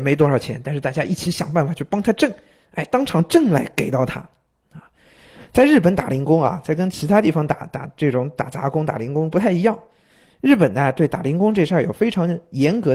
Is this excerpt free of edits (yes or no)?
yes